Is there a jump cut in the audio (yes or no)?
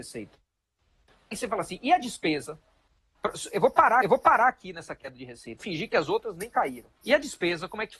yes